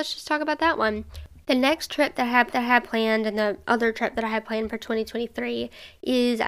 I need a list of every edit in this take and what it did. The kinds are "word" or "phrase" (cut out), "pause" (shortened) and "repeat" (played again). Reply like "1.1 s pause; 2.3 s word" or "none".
2.5 s repeat